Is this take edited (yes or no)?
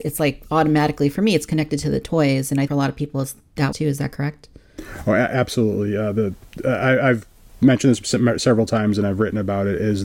yes